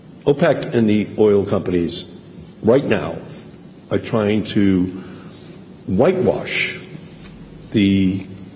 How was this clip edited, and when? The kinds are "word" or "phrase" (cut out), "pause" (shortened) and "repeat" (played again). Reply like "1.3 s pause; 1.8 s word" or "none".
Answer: 3.8 s pause; 5.8 s pause